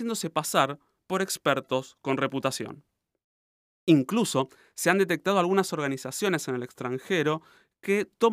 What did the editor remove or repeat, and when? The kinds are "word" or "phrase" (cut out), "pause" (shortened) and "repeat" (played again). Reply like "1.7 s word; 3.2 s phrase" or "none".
none